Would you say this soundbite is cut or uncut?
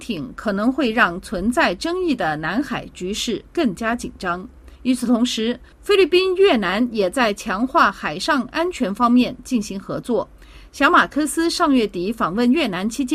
cut